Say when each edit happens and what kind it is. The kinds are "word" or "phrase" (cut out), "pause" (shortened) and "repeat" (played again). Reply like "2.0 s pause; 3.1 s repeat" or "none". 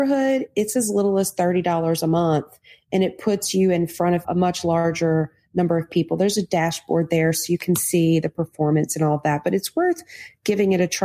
none